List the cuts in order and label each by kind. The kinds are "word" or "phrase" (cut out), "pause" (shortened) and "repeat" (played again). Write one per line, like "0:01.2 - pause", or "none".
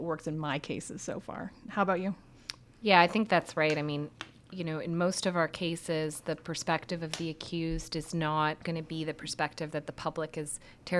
none